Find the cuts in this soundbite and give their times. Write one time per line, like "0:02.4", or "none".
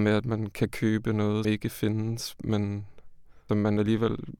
0:01.4
0:03.5